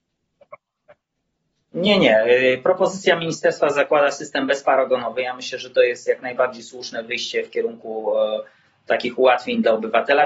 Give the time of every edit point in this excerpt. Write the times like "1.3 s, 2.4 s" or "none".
none